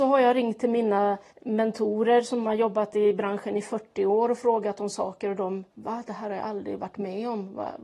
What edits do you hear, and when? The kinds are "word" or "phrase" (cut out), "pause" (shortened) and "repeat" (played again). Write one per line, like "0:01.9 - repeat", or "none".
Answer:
0:01.3 - pause
0:05.7 - pause